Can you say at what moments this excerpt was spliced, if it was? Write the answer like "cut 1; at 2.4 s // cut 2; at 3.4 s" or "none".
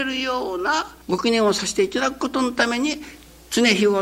cut 1; at 1.0 s